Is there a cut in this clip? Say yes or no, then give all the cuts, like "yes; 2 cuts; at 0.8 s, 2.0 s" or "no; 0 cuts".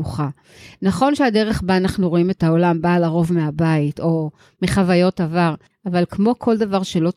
no; 0 cuts